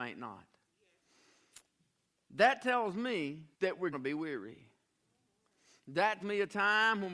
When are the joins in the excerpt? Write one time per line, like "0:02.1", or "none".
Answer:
0:03.5
0:03.9
0:06.2